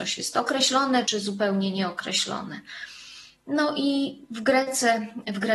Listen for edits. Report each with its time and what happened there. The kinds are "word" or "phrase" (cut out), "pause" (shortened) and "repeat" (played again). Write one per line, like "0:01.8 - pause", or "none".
0:01.1 - word